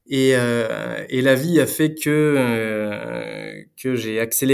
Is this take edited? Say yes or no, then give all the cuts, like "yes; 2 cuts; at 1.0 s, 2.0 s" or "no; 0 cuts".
no; 0 cuts